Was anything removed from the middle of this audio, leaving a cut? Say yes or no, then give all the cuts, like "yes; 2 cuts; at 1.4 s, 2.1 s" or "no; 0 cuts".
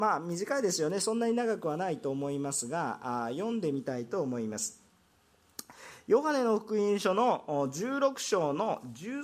no; 0 cuts